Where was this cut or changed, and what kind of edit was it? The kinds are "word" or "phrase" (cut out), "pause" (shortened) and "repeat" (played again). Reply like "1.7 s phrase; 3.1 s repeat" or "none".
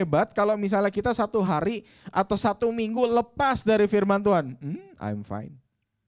none